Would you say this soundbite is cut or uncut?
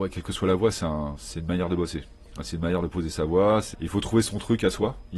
cut